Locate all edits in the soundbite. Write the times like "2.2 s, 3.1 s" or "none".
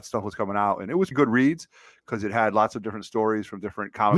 1.1 s